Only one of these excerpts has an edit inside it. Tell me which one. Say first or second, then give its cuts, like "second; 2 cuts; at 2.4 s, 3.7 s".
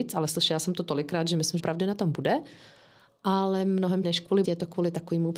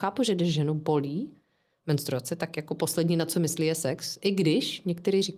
first; 3 cuts; at 1.6 s, 4.0 s, 4.4 s